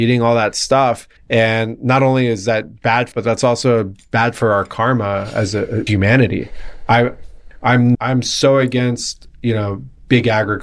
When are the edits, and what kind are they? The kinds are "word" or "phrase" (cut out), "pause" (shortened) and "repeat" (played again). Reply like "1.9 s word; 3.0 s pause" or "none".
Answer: 1.2 s pause; 3.1 s phrase; 5.9 s word; 7.9 s word